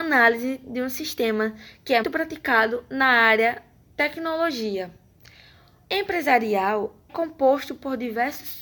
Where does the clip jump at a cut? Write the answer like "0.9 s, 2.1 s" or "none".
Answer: 2.0 s, 3.8 s, 5.8 s, 7.1 s

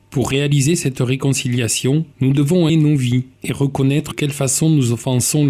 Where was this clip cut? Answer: 2.1 s, 2.7 s, 3.3 s, 4.1 s

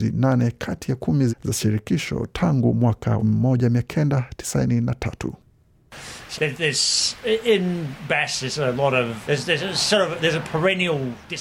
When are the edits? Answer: 1.3 s, 3.2 s, 6.4 s, 9.2 s

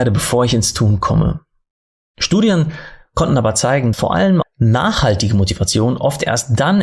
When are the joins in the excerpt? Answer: 3.9 s, 4.4 s

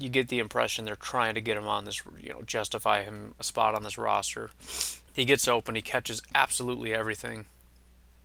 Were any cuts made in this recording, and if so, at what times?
5.1 s

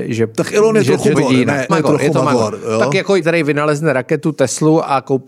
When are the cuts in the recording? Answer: 1.1 s, 1.7 s, 3.2 s

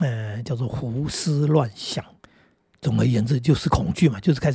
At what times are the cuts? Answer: none

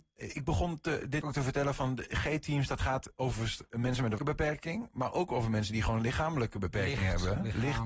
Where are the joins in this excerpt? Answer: 1.2 s, 3.2 s, 4.2 s

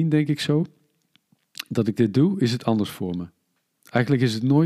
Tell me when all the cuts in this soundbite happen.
none

